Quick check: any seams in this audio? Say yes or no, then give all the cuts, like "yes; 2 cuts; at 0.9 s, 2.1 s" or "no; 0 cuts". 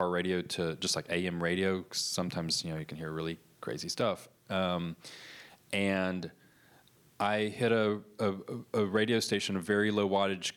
no; 0 cuts